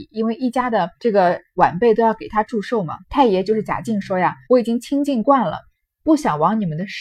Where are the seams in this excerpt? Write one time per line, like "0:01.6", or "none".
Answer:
0:01.0
0:03.0
0:04.4